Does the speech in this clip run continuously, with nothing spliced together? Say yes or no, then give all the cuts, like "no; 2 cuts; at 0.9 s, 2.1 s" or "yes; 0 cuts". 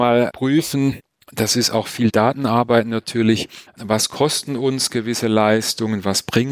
no; 1 cut; at 1.2 s